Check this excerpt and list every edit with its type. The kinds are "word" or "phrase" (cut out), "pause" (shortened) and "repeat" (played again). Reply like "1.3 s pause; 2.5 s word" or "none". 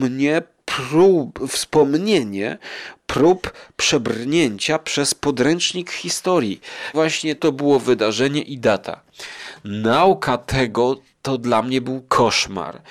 6.9 s word; 7.4 s phrase